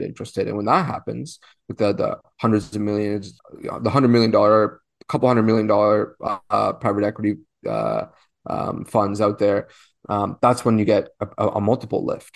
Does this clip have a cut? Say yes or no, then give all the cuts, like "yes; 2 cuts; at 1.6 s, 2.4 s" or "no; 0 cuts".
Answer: no; 0 cuts